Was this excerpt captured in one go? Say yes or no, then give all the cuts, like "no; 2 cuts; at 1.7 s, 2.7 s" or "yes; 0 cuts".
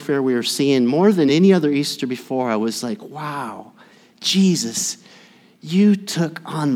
yes; 0 cuts